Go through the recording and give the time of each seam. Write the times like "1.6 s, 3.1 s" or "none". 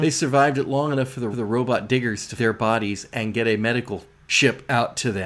1.3 s, 2.4 s